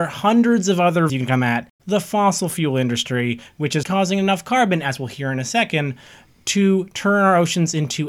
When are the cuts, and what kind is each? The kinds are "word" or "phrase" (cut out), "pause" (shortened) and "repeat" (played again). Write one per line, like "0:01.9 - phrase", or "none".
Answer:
0:01.1 - word
0:01.8 - word
0:03.8 - word